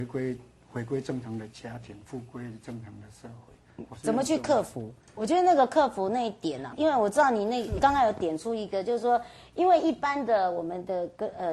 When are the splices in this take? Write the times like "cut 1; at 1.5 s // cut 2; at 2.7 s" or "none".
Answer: cut 1; at 6.7 s